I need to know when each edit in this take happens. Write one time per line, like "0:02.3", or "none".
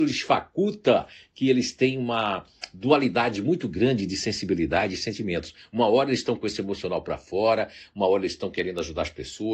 none